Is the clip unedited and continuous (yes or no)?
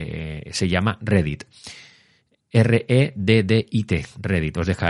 yes